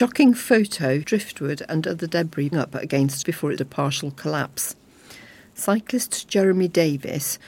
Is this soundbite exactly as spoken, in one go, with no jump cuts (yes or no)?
no